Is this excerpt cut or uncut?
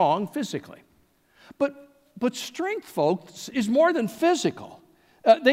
cut